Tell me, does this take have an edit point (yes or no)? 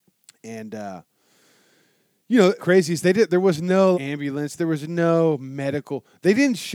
yes